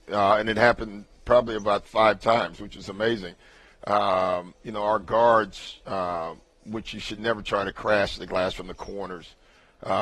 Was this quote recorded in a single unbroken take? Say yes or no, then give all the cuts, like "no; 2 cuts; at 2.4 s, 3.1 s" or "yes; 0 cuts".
yes; 0 cuts